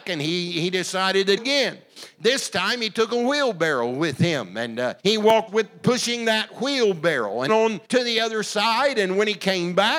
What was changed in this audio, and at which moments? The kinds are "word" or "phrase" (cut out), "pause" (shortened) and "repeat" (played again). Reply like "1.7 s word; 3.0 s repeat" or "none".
1.4 s phrase; 5.0 s pause; 5.5 s word; 7.5 s phrase; 7.8 s pause